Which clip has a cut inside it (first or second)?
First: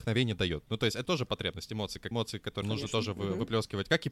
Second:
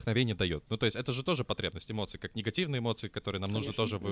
first